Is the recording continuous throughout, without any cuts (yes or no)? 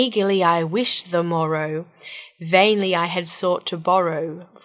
yes